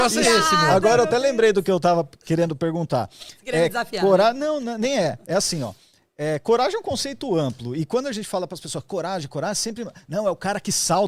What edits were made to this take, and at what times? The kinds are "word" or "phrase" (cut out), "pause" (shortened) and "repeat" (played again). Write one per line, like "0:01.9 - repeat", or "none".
none

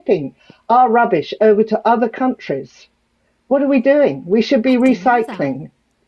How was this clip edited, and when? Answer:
none

